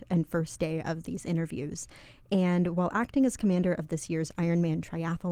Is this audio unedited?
yes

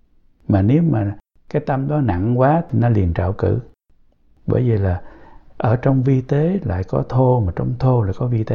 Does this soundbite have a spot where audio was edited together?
no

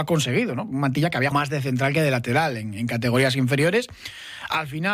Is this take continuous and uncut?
no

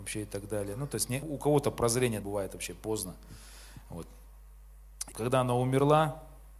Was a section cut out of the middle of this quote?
yes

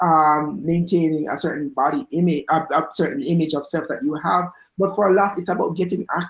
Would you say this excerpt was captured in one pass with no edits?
yes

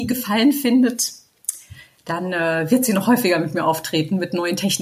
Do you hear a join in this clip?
no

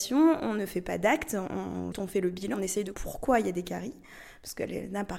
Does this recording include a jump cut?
yes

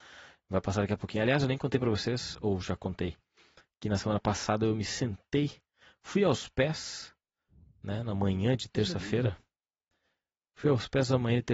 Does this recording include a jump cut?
no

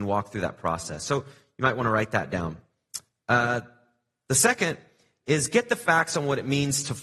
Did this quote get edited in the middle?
no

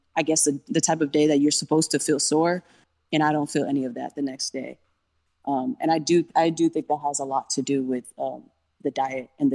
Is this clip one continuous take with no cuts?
yes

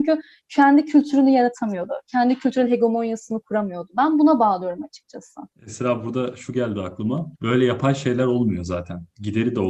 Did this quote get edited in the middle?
yes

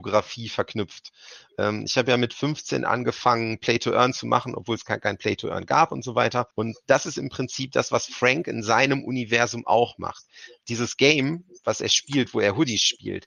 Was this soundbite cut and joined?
yes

